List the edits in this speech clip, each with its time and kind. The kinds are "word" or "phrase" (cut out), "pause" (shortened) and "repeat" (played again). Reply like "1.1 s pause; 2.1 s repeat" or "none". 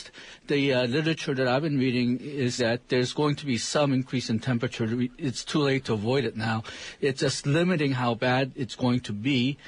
2.6 s word